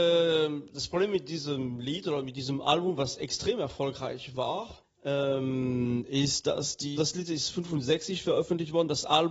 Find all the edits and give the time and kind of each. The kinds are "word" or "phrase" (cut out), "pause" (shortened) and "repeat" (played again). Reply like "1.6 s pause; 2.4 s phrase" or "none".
4.8 s pause; 7.0 s word